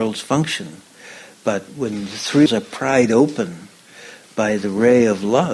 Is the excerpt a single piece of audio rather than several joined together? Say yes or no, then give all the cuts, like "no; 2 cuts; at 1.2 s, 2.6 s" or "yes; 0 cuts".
no; 1 cut; at 2.5 s